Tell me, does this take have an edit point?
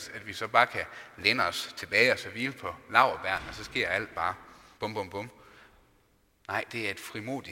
yes; 1 cut; at 4.7 s

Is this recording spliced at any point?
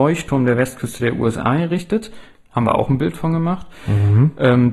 no; 0 cuts

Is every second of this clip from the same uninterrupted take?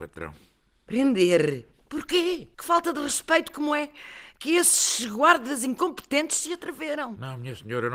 no; 1 cut; at 2.5 s

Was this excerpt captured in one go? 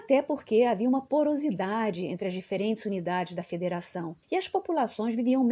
no; 1 cut; at 4.2 s

